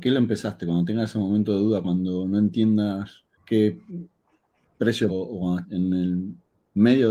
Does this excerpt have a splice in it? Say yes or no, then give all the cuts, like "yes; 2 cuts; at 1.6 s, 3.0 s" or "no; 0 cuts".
yes; 3 cuts; at 3.3 s, 5.1 s, 5.6 s